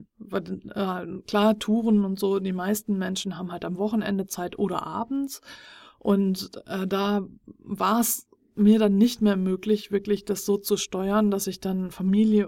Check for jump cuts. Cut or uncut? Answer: uncut